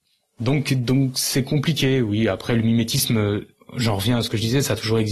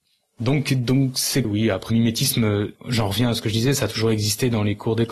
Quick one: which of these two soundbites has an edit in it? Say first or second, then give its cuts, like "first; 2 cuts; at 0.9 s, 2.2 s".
second; 3 cuts; at 1.4 s, 1.9 s, 2.8 s